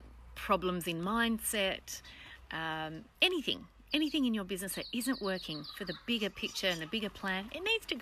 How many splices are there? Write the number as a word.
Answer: one